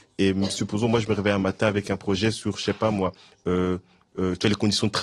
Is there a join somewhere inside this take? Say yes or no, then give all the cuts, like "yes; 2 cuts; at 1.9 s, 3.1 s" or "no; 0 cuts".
no; 0 cuts